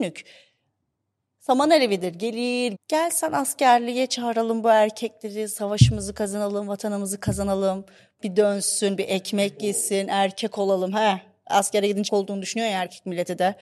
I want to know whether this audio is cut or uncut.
cut